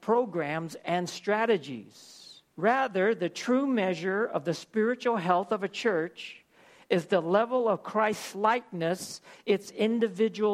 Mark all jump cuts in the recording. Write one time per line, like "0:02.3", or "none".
0:02.5

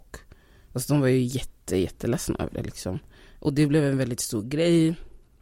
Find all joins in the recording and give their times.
none

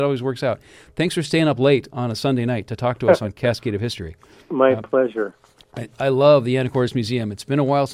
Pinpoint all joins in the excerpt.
none

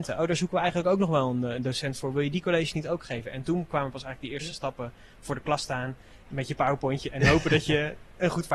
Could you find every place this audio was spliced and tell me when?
none

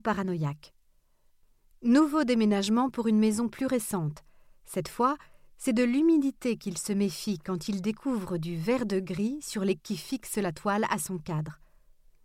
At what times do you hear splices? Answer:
0:09.8

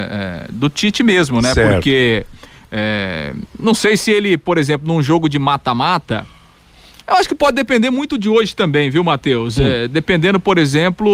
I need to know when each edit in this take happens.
none

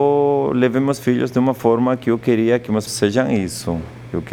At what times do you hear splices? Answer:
0:02.9

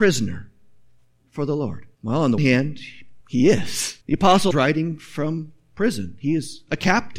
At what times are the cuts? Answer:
0:01.9
0:02.4
0:03.2
0:04.0
0:04.5

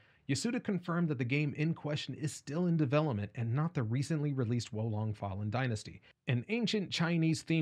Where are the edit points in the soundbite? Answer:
none

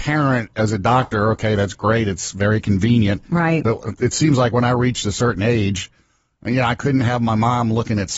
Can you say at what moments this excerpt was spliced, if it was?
none

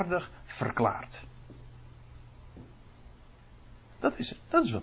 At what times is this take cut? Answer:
none

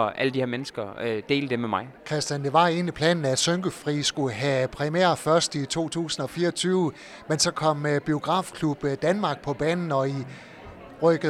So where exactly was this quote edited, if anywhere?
0:02.0

